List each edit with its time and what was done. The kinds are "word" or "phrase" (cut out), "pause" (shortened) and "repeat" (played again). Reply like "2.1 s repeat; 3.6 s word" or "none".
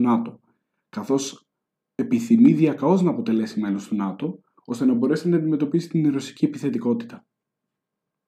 none